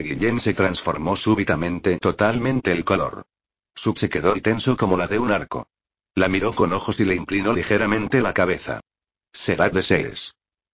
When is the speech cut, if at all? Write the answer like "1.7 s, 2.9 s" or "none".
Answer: 2.0 s, 4.0 s, 4.3 s, 5.1 s, 6.6 s, 7.0 s, 9.7 s